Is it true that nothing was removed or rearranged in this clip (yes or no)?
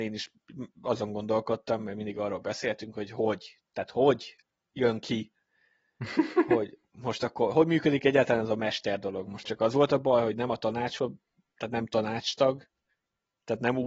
no